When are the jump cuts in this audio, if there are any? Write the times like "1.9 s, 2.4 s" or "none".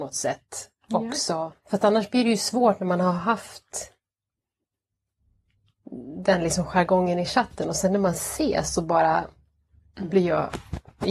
1.6 s